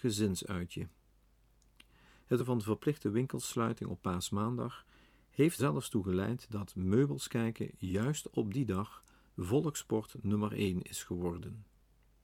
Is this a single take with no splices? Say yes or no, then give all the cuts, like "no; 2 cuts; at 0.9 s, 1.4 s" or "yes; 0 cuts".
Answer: no; 2 cuts; at 2.4 s, 5.6 s